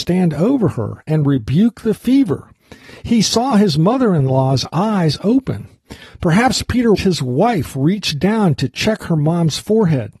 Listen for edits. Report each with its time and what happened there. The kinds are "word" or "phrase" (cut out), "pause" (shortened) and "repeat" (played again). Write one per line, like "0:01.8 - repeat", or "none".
0:06.9 - word